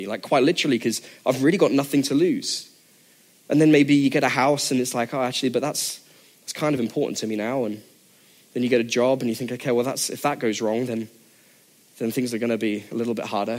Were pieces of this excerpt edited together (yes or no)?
no